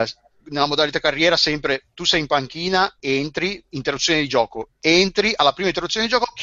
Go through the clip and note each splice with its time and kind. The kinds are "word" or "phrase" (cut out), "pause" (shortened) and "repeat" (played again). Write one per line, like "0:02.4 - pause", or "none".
0:03.0 - pause